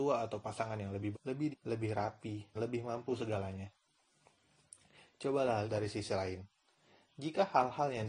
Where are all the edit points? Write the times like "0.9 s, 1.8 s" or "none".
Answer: 1.1 s, 1.5 s, 2.5 s, 5.6 s

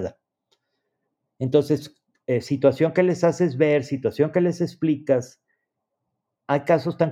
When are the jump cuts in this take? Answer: none

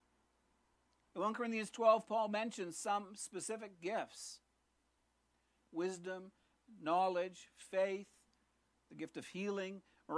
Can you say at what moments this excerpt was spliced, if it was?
none

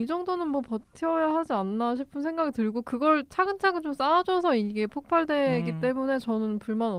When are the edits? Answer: none

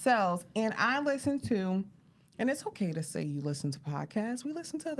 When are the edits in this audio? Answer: none

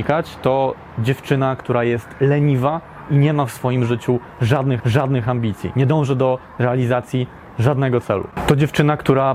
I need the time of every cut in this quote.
4.8 s

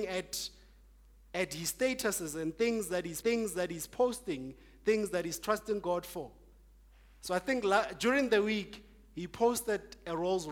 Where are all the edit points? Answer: 3.2 s

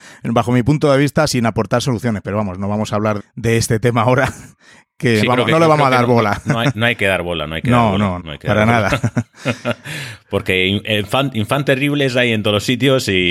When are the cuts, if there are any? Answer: 1.3 s, 3.2 s, 5.3 s, 8.2 s

